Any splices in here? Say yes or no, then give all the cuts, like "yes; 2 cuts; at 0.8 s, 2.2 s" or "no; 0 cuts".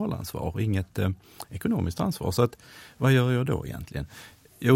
no; 0 cuts